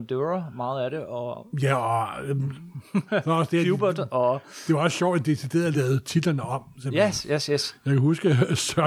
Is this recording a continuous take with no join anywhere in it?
yes; 0 cuts

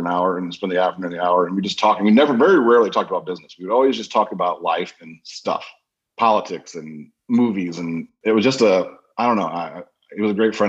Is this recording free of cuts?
yes; 0 cuts

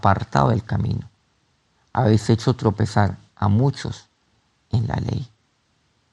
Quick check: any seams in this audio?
no; 0 cuts

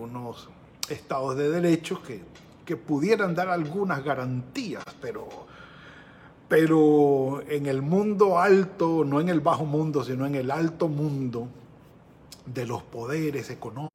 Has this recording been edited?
no; 0 cuts

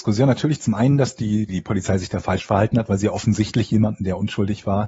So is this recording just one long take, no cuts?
no; 1 cut; at 1.5 s

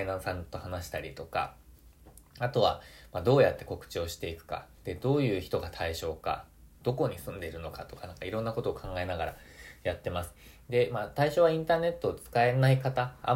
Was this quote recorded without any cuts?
no; 2 cuts; at 4.8 s, 6.7 s

